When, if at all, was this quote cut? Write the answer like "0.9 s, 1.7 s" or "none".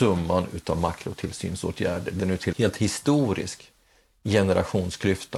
2.2 s, 2.5 s